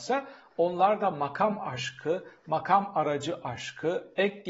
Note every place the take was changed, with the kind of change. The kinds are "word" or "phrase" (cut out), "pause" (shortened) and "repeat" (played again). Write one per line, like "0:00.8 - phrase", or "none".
none